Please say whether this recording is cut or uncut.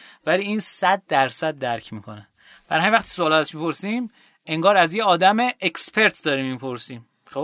uncut